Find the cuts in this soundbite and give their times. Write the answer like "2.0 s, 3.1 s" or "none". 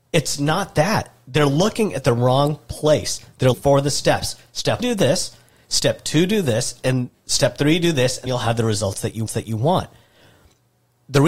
3.5 s, 4.8 s, 8.3 s, 9.3 s